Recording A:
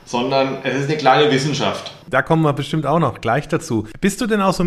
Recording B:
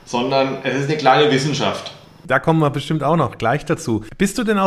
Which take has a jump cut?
A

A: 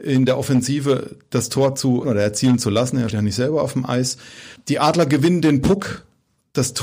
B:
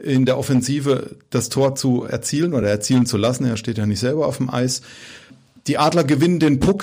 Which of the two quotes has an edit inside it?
A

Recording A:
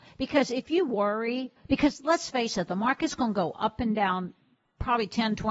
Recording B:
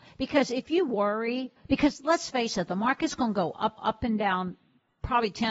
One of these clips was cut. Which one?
B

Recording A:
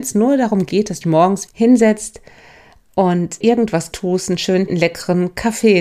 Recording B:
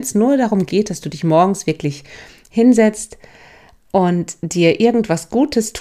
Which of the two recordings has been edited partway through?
A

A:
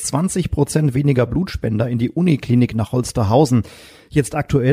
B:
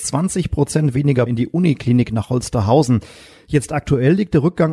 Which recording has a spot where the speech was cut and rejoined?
B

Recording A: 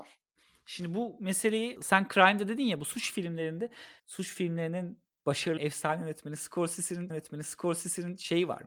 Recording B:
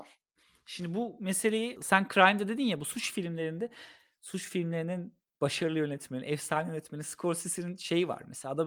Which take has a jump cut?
A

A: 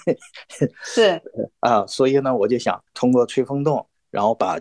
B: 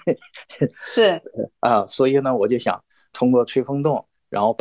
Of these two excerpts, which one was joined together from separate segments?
A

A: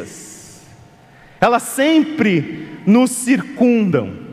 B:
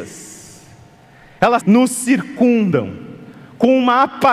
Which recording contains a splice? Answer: B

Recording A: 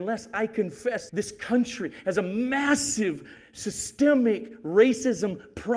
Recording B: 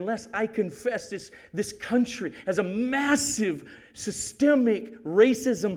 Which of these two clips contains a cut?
A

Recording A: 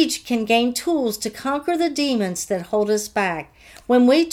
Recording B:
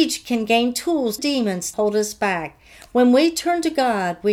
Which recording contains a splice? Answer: B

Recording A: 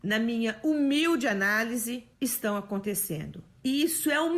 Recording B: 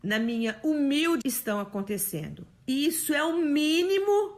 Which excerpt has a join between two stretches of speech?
B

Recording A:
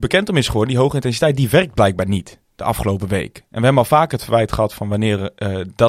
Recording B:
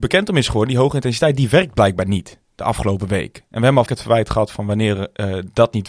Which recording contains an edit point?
B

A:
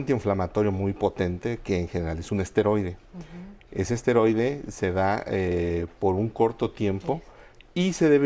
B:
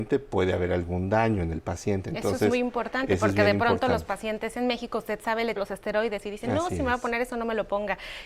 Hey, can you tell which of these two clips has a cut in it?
B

